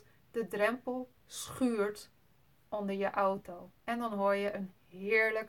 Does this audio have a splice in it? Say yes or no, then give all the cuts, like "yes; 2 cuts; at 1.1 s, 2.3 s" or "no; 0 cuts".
no; 0 cuts